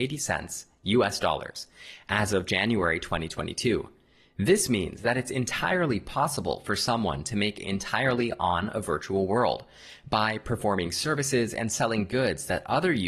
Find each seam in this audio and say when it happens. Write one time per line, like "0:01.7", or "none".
0:07.6